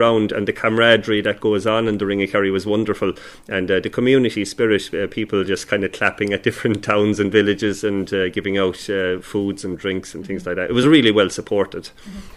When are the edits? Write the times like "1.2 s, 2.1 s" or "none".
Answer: none

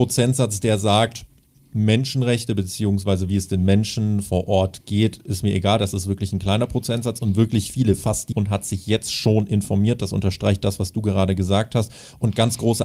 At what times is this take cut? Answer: 8.3 s

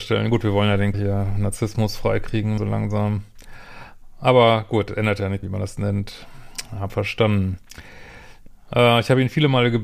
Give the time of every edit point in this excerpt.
0.9 s, 2.6 s, 5.4 s, 6.9 s

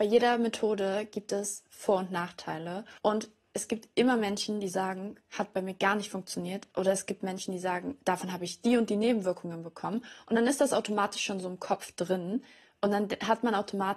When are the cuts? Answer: 3.0 s, 6.7 s, 8.0 s

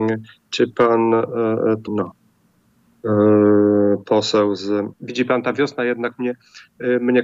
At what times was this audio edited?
1.9 s, 4.9 s

